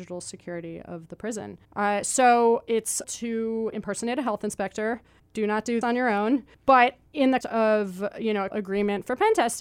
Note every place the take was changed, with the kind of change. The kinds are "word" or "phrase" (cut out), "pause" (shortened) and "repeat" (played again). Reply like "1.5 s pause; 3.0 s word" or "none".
1.6 s pause; 3.0 s word; 5.2 s pause; 5.8 s word; 6.5 s pause; 7.4 s word; 8.5 s word